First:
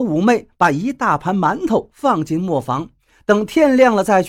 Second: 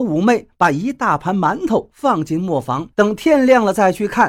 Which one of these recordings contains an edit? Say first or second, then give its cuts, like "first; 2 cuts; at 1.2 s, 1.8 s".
second; 1 cut; at 2.9 s